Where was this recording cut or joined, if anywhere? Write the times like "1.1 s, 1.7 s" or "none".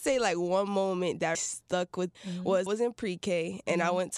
1.3 s, 2.1 s, 2.7 s